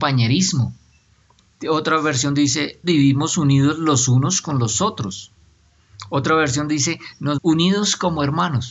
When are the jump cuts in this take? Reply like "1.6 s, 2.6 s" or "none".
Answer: 2.8 s, 7.4 s